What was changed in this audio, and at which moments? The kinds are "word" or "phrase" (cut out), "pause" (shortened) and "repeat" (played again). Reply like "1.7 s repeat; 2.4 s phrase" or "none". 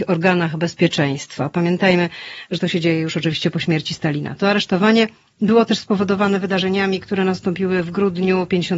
none